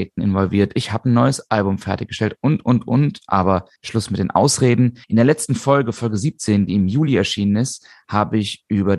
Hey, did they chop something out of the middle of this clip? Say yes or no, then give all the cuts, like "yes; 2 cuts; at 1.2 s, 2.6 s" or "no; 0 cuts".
yes; 2 cuts; at 3.8 s, 5.0 s